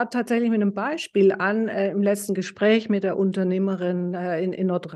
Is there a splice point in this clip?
no; 0 cuts

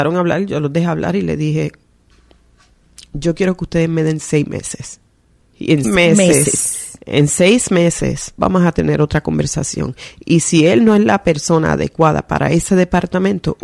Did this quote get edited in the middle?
yes; 3 cuts; at 5.4 s, 5.8 s, 8.4 s

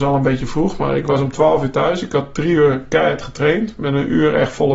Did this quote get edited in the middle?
no; 0 cuts

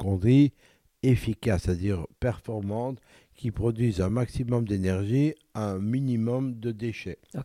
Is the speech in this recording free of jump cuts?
yes; 0 cuts

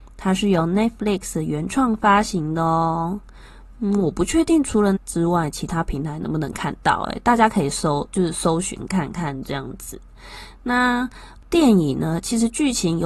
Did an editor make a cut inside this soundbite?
yes; 1 cut; at 5.0 s

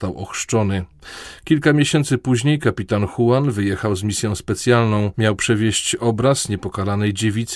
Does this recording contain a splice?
no; 0 cuts

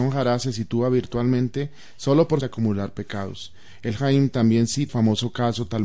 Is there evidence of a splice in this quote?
yes; 3 cuts; at 2.4 s, 4.0 s, 4.9 s

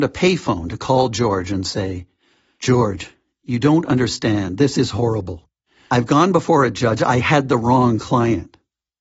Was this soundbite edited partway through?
no; 0 cuts

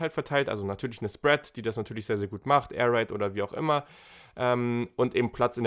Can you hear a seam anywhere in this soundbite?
no; 0 cuts

